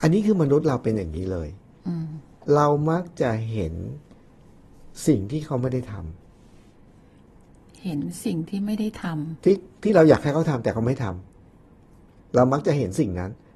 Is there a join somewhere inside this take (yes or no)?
no